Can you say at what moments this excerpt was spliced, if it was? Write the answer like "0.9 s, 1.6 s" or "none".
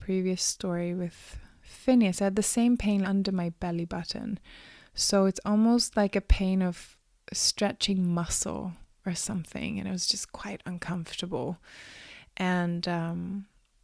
3.0 s